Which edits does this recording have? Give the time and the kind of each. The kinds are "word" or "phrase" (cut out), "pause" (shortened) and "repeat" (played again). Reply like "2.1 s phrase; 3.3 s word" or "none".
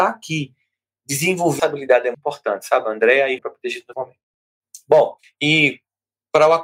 1.6 s word; 2.1 s word; 3.4 s word; 3.9 s phrase; 5.2 s pause